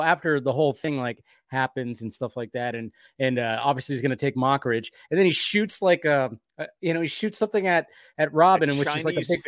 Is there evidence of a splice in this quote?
no; 0 cuts

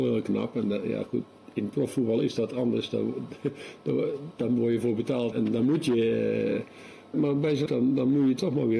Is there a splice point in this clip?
yes; 3 cuts; at 5.3 s, 7.1 s, 7.7 s

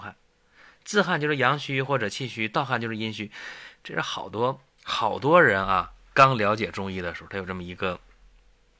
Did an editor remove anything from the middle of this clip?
yes; 1 cut; at 4.7 s

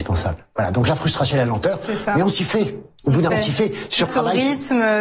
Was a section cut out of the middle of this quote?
yes; 3 cuts; at 1.3 s, 3.3 s, 4.1 s

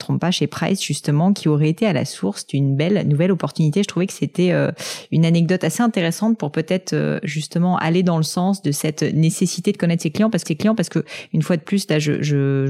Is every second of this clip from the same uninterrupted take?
no; 1 cut; at 10.4 s

